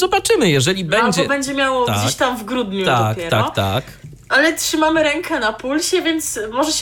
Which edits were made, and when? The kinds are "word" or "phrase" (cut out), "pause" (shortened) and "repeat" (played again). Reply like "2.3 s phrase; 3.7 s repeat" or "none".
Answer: none